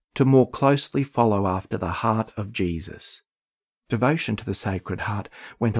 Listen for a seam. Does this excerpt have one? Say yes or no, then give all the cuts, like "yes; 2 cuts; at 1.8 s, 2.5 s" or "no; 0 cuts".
no; 0 cuts